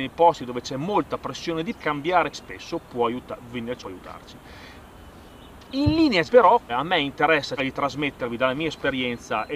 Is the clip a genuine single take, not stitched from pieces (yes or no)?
no